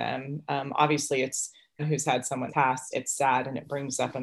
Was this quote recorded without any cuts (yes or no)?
no